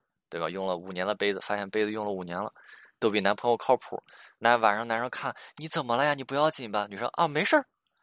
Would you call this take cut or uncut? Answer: uncut